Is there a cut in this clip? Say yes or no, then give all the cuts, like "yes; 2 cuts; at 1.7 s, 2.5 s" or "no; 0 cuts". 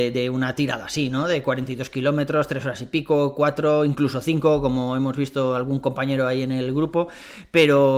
no; 0 cuts